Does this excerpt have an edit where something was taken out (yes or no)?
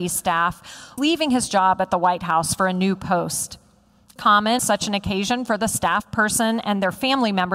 yes